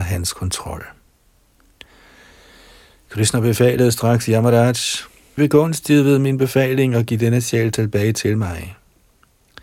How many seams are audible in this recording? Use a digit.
1